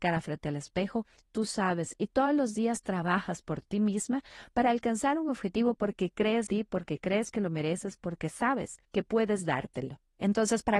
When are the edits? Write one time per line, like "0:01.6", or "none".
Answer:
0:06.5
0:08.8

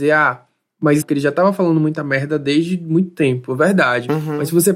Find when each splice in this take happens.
0:01.0

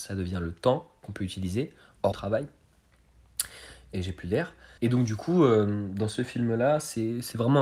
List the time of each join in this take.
0:02.1
0:04.8

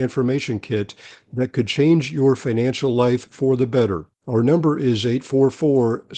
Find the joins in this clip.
0:04.1

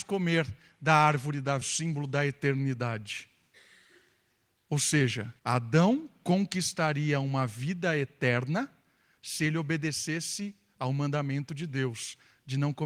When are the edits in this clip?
0:01.6
0:05.4

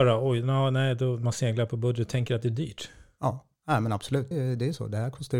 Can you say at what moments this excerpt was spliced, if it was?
0:04.3

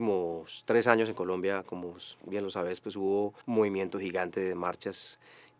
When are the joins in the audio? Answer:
0:03.4

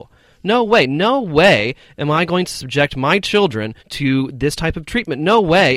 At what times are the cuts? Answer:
0:03.8

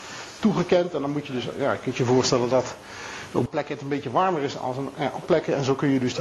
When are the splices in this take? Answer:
0:03.5
0:05.2

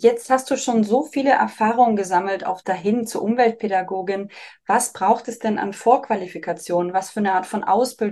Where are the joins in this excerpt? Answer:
0:02.6

